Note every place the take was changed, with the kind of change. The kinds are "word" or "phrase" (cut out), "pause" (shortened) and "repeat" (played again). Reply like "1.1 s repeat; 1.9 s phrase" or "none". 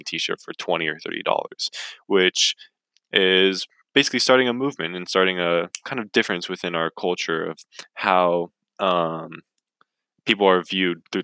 none